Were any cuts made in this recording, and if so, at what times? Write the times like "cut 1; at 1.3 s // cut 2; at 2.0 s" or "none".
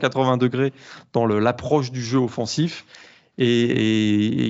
none

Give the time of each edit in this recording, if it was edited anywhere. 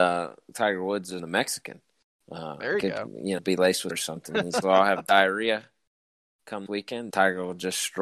cut 1; at 1.2 s // cut 2; at 3.4 s // cut 3; at 3.9 s // cut 4; at 4.6 s // cut 5; at 6.7 s // cut 6; at 7.1 s

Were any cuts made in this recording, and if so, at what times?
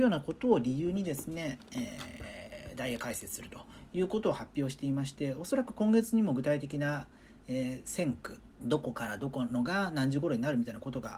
cut 1; at 8.5 s

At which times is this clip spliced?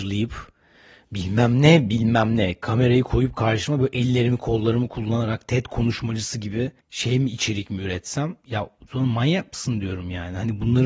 cut 1; at 6.8 s

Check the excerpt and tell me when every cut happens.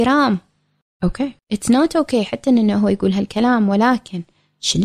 cut 1; at 1.4 s

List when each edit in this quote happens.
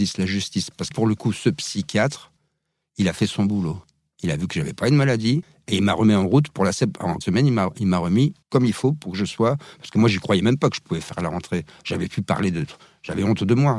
cut 1; at 0.9 s // cut 2; at 7.2 s // cut 3; at 8.4 s

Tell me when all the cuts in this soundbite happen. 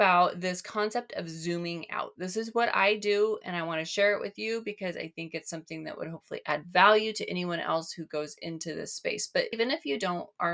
cut 1; at 9.5 s

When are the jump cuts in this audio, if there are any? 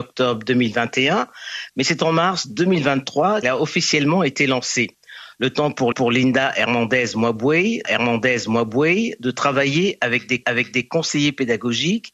cut 1; at 3.4 s // cut 2; at 5.9 s // cut 3; at 7.8 s // cut 4; at 10.4 s

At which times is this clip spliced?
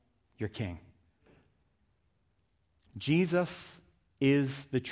none

